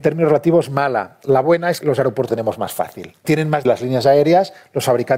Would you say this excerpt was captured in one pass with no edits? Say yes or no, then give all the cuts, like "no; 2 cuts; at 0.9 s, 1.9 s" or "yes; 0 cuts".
no; 4 cuts; at 1.8 s, 2.3 s, 3.2 s, 3.6 s